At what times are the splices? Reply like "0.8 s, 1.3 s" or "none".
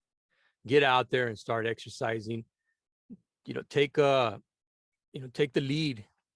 none